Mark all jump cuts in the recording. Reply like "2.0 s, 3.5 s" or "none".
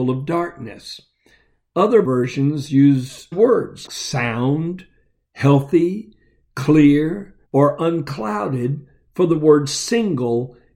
2.0 s, 3.3 s, 3.9 s, 7.4 s